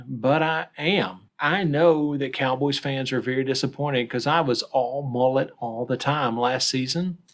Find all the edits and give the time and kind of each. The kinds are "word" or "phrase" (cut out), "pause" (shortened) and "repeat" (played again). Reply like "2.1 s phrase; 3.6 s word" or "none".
1.3 s pause

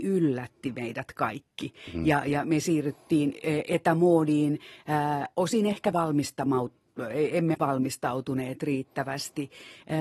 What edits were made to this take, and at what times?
5.9 s word; 7.5 s word

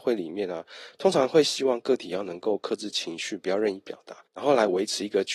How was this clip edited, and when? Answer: 4.3 s pause

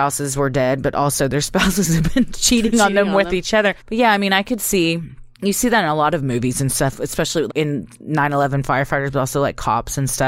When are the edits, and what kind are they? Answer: 3.8 s pause; 5.3 s pause; 7.5 s word

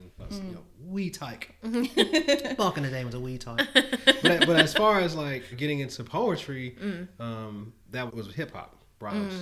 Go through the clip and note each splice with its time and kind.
5.5 s word; 8.1 s word

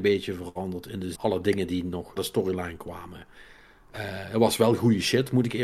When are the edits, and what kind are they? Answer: 1.1 s phrase; 2.2 s word

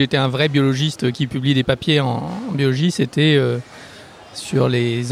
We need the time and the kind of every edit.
none

